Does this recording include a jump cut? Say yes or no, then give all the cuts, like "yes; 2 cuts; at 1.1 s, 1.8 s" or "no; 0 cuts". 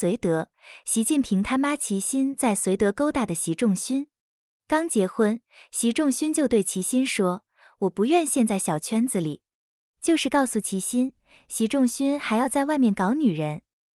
no; 0 cuts